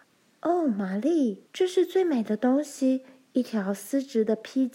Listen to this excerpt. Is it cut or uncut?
cut